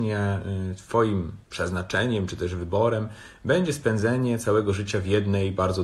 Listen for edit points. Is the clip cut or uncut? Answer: cut